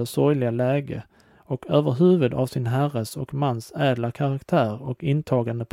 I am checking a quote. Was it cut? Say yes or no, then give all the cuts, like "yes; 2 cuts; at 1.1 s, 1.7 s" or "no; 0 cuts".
no; 0 cuts